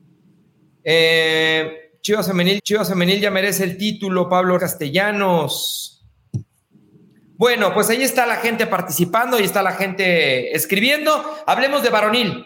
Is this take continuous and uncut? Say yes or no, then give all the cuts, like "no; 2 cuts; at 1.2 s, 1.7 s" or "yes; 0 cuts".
no; 2 cuts; at 2.6 s, 4.6 s